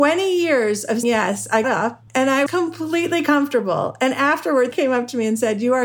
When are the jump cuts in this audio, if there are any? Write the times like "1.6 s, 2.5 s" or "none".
1.0 s, 1.6 s, 2.1 s, 2.5 s, 4.7 s